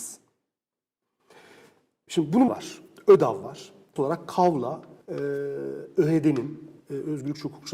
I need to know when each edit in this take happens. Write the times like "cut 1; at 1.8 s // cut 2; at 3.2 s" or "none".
cut 1; at 2.5 s // cut 2; at 4.0 s // cut 3; at 5.0 s // cut 4; at 6.8 s